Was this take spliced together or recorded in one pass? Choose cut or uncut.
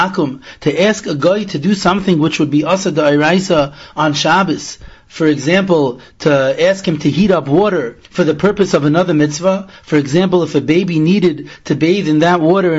cut